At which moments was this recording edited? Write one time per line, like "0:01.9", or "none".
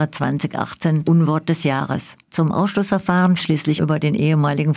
0:01.0
0:02.2
0:03.4
0:03.8

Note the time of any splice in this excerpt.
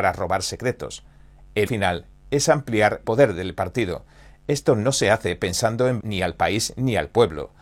0:01.7
0:03.0
0:06.0

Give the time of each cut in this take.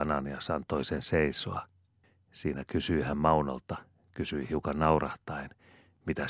0:02.0

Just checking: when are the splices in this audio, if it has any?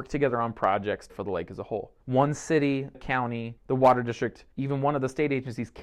0:01.1
0:02.0
0:02.9
0:03.6
0:04.5

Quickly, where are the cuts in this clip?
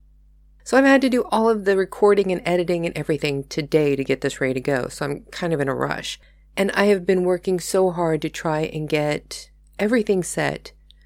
none

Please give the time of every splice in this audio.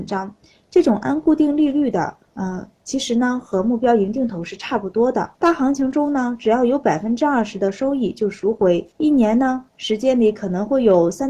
0:02.3
0:05.3
0:08.9
0:09.7

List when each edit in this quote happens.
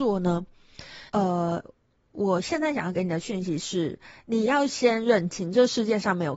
0:01.1

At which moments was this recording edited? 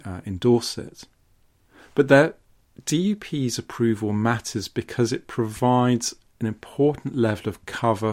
none

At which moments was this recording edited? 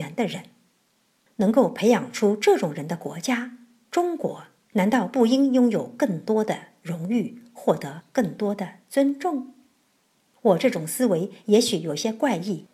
none

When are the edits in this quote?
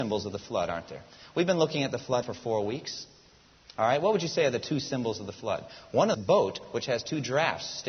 0:02.2
0:06.1

